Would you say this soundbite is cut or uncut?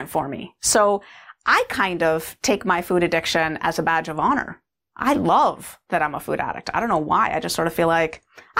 uncut